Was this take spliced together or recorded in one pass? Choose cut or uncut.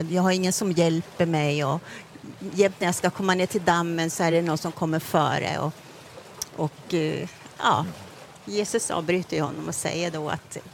uncut